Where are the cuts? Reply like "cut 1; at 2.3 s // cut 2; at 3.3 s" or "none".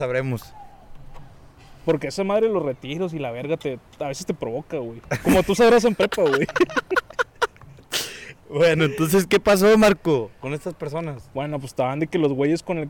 none